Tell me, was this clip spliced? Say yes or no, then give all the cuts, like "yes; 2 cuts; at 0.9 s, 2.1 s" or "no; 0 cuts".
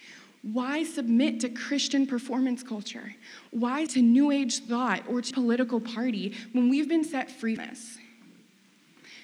yes; 3 cuts; at 3.9 s, 5.3 s, 7.6 s